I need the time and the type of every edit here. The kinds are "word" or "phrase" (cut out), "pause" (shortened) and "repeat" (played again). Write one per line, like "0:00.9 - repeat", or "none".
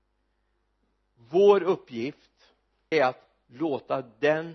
0:02.9 - word

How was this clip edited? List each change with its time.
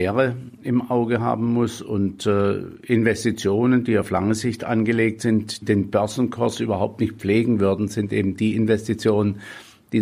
0:05.6 - word

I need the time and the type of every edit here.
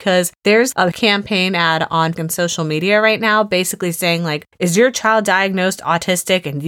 0:00.9 - word
0:02.1 - word

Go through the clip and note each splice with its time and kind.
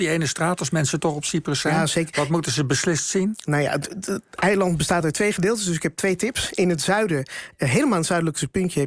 none

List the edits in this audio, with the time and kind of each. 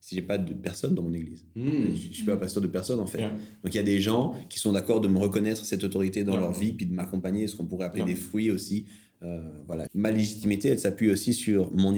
0:09.9 - phrase

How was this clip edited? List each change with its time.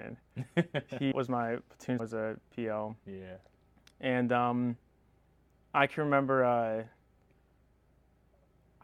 0:01.1 - word
0:02.0 - phrase

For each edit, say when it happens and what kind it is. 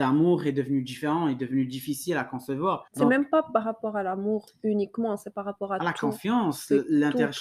0:02.9 - pause

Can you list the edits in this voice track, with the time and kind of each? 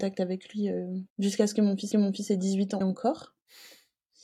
0:01.1 - pause
0:01.9 - repeat
0:02.8 - word

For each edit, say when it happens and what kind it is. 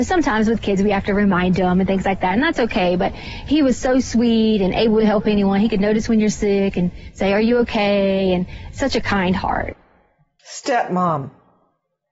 none

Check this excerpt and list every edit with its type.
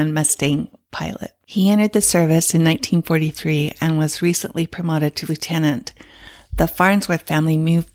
0:01.4 - pause
0:05.3 - word

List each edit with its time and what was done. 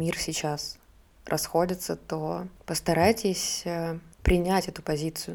none

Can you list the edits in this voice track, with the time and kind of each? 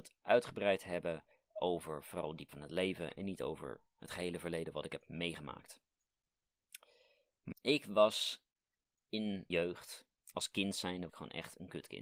0:01.3 - pause
0:02.5 - word
0:07.5 - word
0:09.5 - word
0:10.2 - pause
0:11.1 - word

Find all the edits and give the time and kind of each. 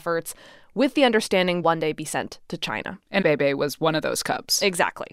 0:01.6 - word
0:03.2 - phrase

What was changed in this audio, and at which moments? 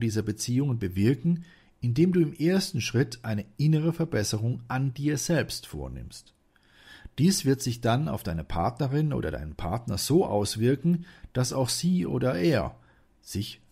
none

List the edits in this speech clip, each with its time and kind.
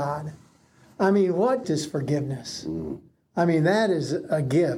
0:01.6 - phrase

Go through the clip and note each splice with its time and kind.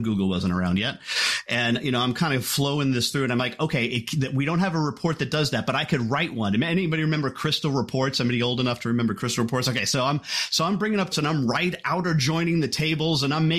0:11.1 - phrase

